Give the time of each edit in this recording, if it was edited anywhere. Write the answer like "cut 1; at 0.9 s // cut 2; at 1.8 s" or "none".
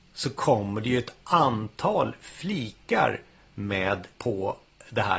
cut 1; at 4.1 s